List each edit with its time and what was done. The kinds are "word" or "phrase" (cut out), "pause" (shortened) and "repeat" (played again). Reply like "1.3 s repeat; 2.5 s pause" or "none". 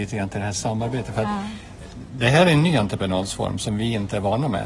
none